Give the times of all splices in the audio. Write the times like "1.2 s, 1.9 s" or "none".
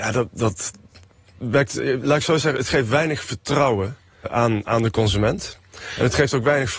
1.4 s, 4.2 s